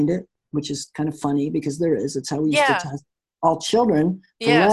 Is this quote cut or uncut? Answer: uncut